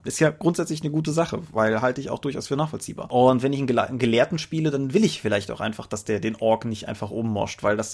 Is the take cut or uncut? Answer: uncut